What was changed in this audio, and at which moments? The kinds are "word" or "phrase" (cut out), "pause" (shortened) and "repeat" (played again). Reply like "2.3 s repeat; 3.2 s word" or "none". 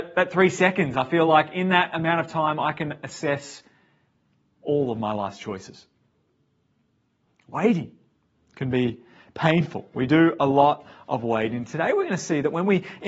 none